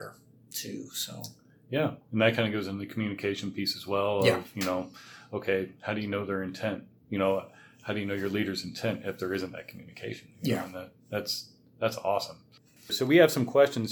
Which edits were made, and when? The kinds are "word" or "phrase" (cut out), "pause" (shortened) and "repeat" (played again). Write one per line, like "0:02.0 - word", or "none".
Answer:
none

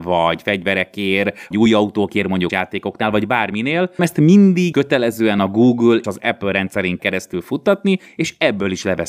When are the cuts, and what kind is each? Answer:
0:01.5 - word
0:02.5 - word
0:04.0 - word
0:04.7 - word
0:06.0 - word
0:07.0 - word

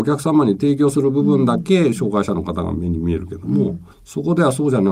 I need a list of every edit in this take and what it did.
0:03.9 - pause

